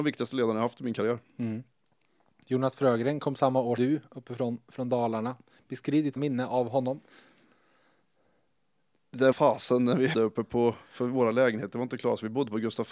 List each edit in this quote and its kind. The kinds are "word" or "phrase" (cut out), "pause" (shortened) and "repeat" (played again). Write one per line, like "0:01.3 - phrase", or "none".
0:03.8 - word
0:06.2 - word
0:09.3 - word
0:10.1 - word